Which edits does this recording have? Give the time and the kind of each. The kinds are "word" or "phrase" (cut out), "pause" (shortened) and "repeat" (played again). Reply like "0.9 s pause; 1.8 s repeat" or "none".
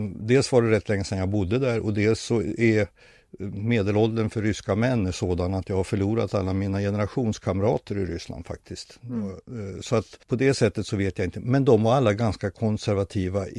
10.2 s pause